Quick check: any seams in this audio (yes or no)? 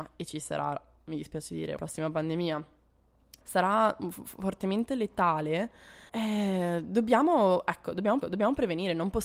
yes